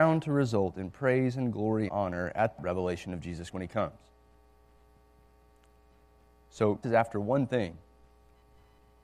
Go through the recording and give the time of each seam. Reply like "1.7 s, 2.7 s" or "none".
1.9 s, 2.6 s, 3.5 s, 6.8 s

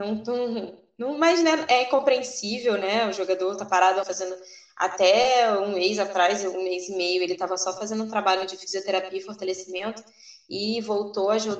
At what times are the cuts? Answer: 4.0 s

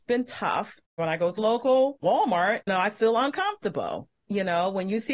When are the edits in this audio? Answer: 1.4 s, 2.7 s

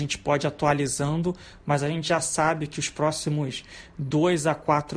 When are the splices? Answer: none

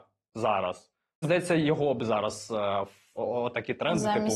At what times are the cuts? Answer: 1.2 s, 3.2 s

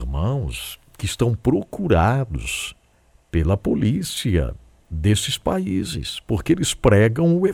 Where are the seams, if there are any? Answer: 2.9 s

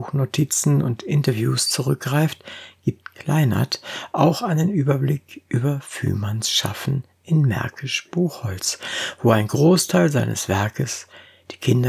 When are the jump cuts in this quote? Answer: none

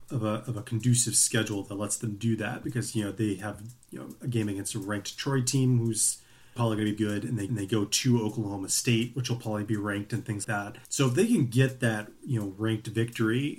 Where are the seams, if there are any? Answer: 6.6 s, 7.0 s, 7.5 s, 10.4 s, 10.8 s

